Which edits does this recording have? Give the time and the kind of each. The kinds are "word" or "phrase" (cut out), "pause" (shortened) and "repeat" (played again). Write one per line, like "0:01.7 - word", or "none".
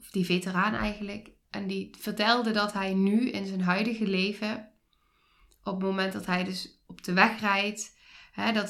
none

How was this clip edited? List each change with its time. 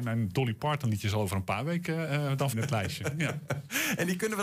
0:02.5 - phrase

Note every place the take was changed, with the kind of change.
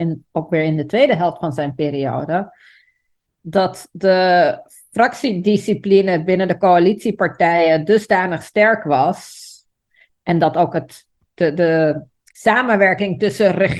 none

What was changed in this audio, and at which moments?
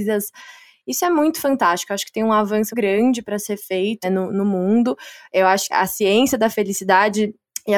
0:02.7 - word
0:04.0 - word
0:05.7 - word

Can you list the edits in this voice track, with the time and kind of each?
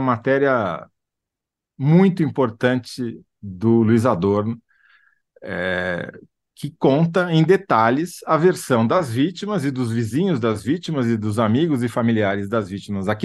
none

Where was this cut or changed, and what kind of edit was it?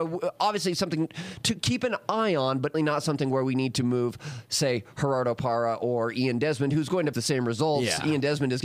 0:02.7 - word
0:07.1 - word

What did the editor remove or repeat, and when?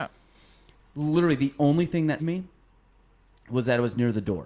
0:02.2 - word

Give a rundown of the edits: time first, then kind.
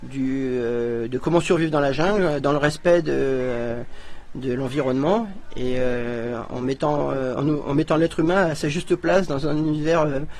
none

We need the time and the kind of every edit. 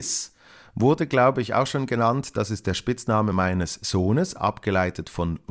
none

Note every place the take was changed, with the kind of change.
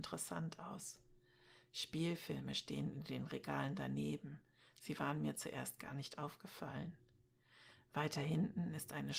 none

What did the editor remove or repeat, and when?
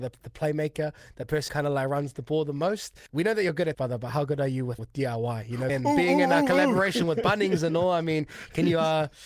0:01.5 - word
0:03.7 - word
0:04.8 - word
0:05.7 - word

